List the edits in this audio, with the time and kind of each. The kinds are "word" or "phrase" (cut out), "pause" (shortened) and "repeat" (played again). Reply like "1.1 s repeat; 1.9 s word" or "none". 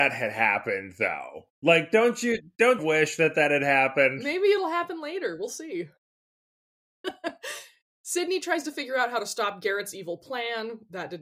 2.8 s phrase